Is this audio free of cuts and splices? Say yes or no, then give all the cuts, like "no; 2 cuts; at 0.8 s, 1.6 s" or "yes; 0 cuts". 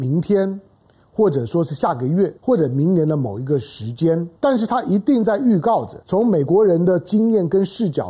no; 3 cuts; at 2.4 s, 4.4 s, 6.0 s